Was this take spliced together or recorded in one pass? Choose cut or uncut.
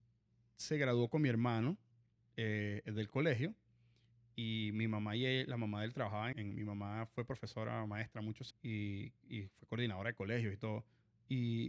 cut